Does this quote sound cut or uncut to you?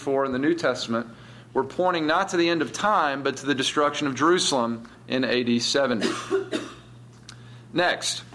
cut